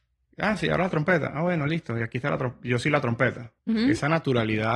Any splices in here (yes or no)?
yes